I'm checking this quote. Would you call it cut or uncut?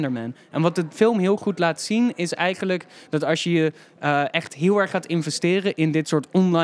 uncut